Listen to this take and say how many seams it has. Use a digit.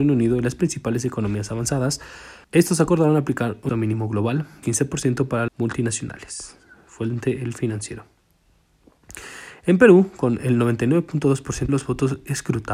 5